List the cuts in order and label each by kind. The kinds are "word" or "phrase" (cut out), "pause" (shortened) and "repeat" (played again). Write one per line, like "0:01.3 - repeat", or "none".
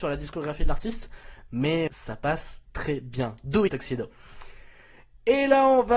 0:01.9 - word
0:02.7 - word
0:03.7 - phrase